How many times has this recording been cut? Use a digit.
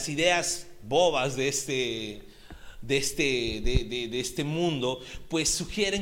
0